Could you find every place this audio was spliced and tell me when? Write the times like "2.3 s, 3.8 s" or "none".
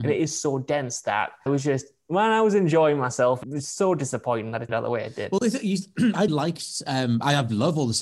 1.5 s, 3.4 s, 4.7 s, 6.3 s

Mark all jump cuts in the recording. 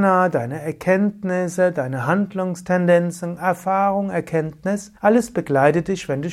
5.0 s

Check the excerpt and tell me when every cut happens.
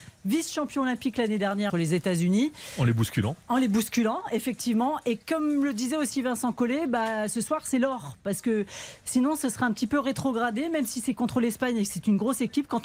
1.7 s, 3.4 s

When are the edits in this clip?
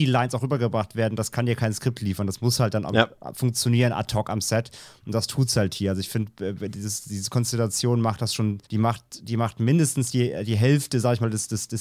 8.7 s

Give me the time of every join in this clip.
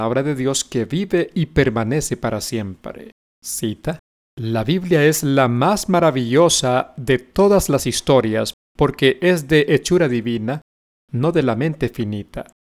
3.3 s

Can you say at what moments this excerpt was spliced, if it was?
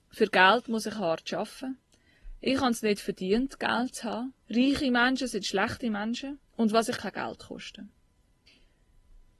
4.4 s, 6.5 s, 7.0 s

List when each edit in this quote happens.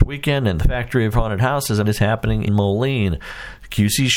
1.1 s, 1.8 s, 2.5 s

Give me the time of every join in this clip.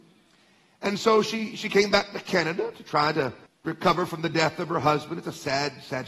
3.5 s

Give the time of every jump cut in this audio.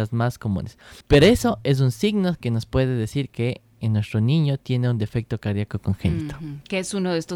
1.0 s

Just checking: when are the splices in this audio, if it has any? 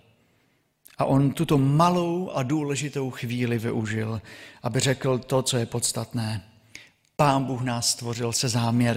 none

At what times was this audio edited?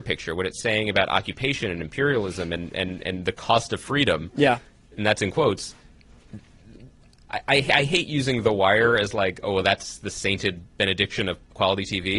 none

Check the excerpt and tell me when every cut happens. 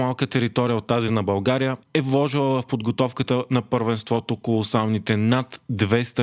none

